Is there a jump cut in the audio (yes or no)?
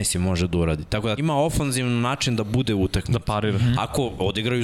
yes